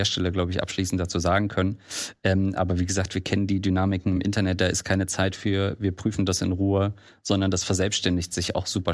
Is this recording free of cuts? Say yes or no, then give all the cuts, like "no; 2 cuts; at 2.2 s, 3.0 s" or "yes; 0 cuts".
yes; 0 cuts